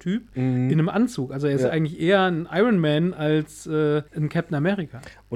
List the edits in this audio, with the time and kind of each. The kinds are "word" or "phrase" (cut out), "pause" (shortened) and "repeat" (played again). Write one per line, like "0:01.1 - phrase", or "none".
0:04.1 - pause